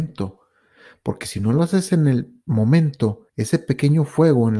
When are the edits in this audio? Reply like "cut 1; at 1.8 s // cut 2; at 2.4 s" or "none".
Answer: cut 1; at 3.3 s